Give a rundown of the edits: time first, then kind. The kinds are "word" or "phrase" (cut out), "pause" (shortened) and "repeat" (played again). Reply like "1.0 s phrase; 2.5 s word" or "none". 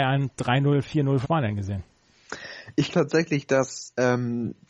1.2 s word; 2.9 s word